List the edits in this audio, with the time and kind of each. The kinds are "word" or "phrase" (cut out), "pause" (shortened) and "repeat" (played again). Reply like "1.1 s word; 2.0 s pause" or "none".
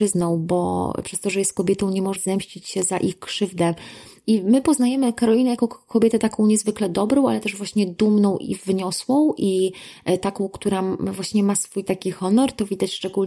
2.2 s word